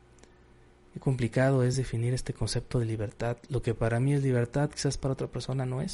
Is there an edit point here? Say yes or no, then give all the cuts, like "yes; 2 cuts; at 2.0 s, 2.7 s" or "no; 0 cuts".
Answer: no; 0 cuts